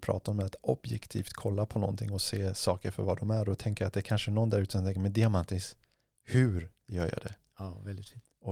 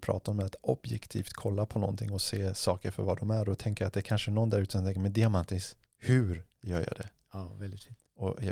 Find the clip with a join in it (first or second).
second